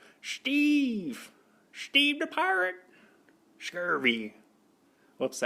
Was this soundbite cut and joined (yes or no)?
no